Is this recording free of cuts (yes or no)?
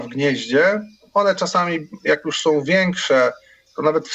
yes